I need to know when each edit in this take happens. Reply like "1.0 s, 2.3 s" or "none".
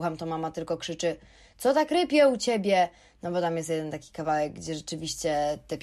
none